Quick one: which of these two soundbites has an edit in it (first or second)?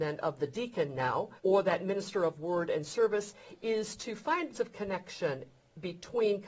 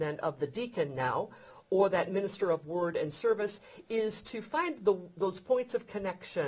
first